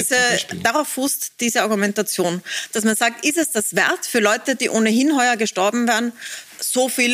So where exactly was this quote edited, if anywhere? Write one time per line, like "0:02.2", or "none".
none